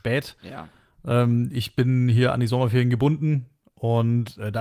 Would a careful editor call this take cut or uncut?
uncut